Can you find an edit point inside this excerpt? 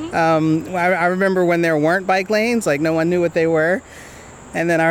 no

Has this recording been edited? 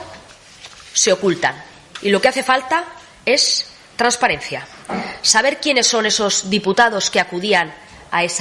no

